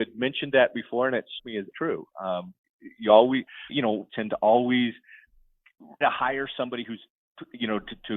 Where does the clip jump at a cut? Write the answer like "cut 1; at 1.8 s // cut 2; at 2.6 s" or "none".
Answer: cut 1; at 1.4 s // cut 2; at 1.7 s // cut 3; at 3.7 s // cut 4; at 4.1 s // cut 5; at 6.0 s